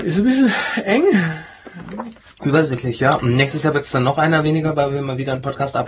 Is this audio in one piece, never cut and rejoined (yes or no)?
yes